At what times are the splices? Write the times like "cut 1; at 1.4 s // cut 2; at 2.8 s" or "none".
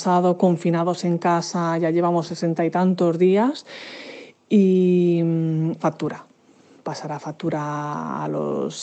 cut 1; at 5.8 s